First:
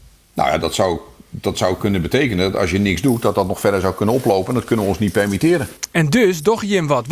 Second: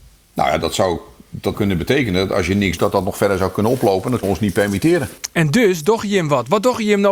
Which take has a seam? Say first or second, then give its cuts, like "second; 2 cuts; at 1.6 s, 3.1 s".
second; 3 cuts; at 1.5 s, 2.8 s, 4.2 s